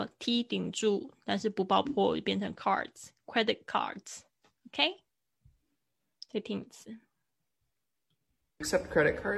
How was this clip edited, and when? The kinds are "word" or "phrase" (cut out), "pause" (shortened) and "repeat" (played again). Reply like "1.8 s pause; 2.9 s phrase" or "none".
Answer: 2.5 s word